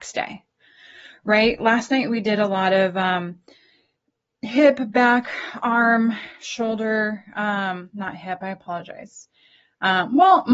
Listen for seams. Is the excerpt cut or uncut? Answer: uncut